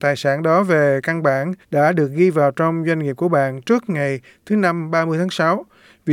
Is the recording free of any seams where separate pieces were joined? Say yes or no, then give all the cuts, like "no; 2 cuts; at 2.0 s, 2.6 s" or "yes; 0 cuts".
no; 1 cut; at 1.6 s